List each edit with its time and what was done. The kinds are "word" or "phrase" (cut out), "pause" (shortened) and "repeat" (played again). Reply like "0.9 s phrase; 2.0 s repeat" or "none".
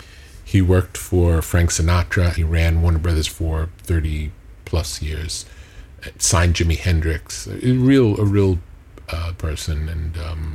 2.4 s word; 3.3 s word; 9.4 s word